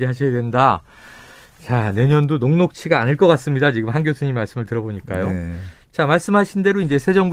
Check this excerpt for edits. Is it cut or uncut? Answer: uncut